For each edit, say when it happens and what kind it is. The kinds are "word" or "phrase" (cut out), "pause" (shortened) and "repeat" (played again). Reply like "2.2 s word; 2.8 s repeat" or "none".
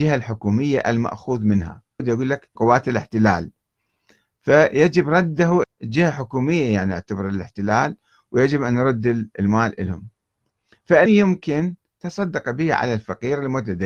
2.0 s word; 2.6 s word; 5.6 s word; 11.1 s word